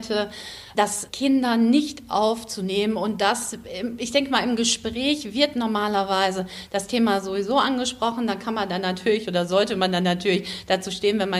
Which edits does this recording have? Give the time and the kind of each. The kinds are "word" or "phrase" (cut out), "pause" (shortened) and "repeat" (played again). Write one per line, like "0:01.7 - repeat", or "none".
none